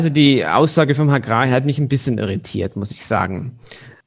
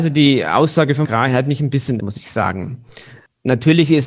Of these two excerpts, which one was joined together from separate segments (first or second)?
second